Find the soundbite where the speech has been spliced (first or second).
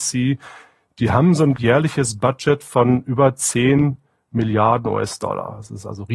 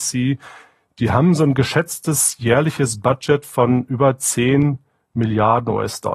first